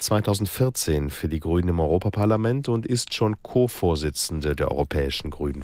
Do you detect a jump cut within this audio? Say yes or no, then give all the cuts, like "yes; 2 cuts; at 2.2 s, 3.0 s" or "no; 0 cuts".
no; 0 cuts